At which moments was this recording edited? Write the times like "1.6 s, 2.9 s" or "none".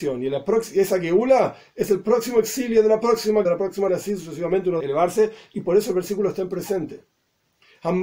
3.4 s, 3.9 s, 4.8 s